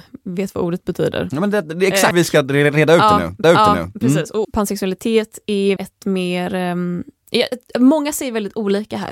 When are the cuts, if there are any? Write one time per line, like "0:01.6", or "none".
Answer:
0:02.1
0:03.4
0:04.4
0:05.8